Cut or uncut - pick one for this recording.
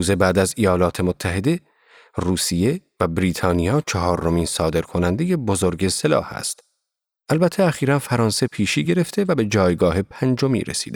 uncut